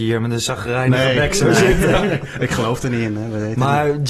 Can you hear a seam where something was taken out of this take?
no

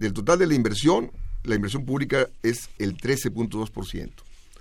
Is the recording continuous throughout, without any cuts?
no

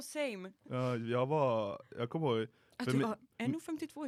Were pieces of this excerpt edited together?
no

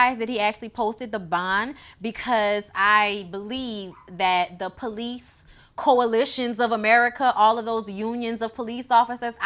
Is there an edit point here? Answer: no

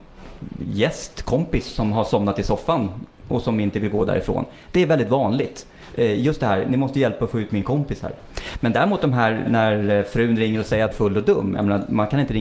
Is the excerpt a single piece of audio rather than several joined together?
no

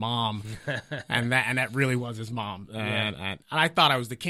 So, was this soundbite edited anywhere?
no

